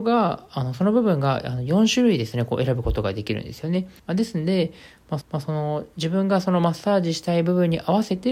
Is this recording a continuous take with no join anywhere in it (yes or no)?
no